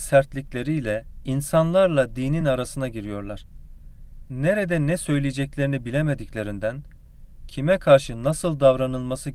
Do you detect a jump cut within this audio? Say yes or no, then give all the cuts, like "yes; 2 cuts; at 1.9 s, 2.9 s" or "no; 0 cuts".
no; 0 cuts